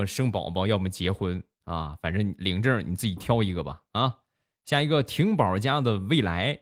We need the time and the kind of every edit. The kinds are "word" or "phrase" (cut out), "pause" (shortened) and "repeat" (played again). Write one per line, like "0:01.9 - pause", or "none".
none